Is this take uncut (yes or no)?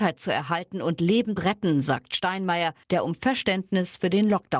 no